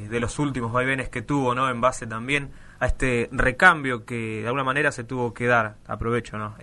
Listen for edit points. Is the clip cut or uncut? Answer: uncut